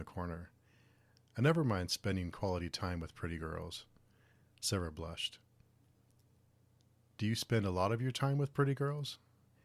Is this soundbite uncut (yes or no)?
yes